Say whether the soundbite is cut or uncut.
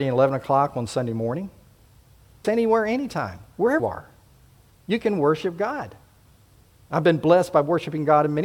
cut